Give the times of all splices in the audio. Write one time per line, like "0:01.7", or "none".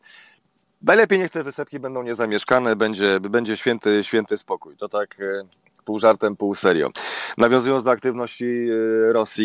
none